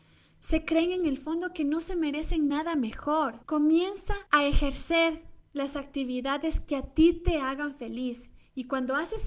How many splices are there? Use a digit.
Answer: 0